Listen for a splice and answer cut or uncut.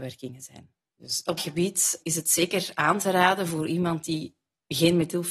cut